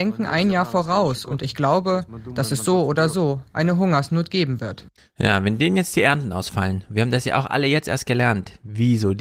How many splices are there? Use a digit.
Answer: 1